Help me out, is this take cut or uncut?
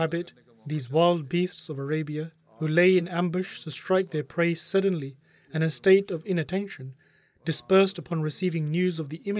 uncut